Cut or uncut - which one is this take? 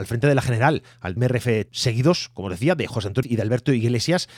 cut